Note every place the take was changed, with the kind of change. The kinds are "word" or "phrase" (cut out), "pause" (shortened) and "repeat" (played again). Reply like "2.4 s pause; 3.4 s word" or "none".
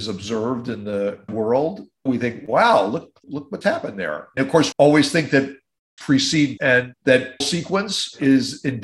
1.3 s word; 2.1 s word; 3.2 s word; 3.6 s word; 4.4 s word; 4.7 s word; 6.0 s word; 6.6 s word; 7.4 s word